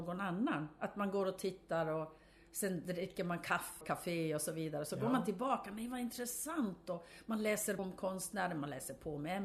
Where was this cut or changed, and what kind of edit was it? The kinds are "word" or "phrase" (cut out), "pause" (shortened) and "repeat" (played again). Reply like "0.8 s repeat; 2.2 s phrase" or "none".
3.8 s phrase; 7.8 s word